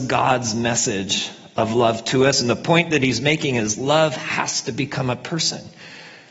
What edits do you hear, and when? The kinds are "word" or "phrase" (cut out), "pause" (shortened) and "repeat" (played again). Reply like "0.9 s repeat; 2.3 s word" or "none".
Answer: none